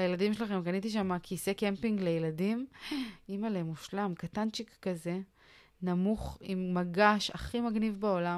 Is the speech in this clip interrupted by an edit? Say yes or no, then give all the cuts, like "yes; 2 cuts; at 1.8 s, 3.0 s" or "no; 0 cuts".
no; 0 cuts